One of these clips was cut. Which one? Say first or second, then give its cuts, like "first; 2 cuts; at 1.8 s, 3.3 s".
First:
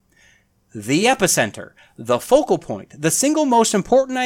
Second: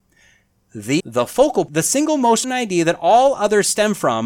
second; 3 cuts; at 1.0 s, 1.7 s, 2.4 s